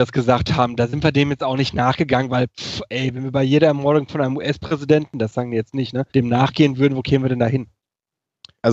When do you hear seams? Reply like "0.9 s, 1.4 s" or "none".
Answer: 6.1 s